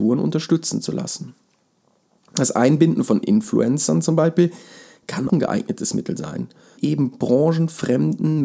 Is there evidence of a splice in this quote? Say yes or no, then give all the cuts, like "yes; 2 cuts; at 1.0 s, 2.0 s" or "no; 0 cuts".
yes; 2 cuts; at 5.3 s, 6.8 s